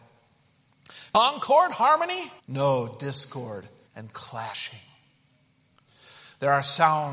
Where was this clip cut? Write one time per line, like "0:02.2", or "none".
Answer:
0:02.4
0:03.9

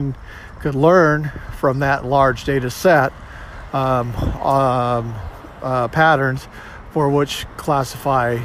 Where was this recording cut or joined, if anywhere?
none

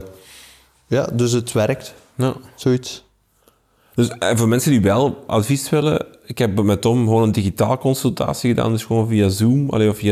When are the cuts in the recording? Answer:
none

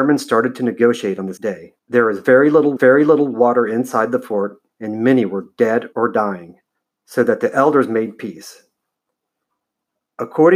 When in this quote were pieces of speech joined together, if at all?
0:01.4
0:01.8
0:02.8
0:04.7
0:05.9
0:06.8

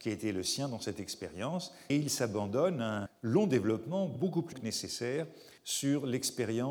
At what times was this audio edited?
0:01.9
0:03.1
0:04.5
0:05.6

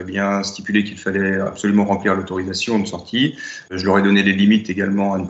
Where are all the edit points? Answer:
none

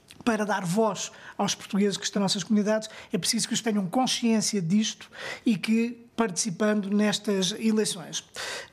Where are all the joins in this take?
0:02.2
0:03.6
0:06.1

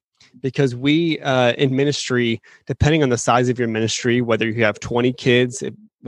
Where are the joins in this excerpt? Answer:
none

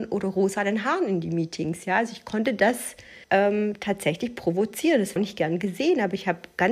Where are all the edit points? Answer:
0:03.2
0:05.2

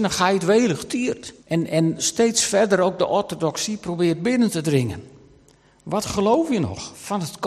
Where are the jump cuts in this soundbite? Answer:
0:01.4

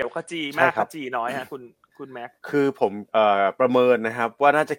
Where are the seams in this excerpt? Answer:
0:02.4
0:03.1

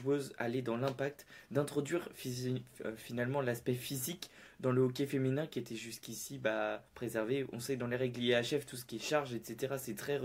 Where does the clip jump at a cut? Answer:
0:06.9

